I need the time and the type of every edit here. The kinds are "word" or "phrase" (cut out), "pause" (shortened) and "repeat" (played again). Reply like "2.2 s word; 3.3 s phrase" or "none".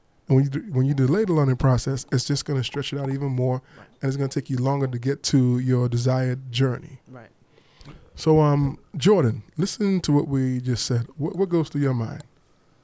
8.9 s pause